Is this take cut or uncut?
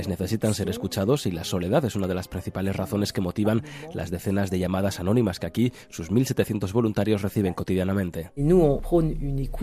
uncut